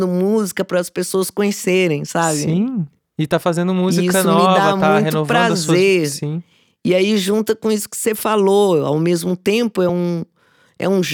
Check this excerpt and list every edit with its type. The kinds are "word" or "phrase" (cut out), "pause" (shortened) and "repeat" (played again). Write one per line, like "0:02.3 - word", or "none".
none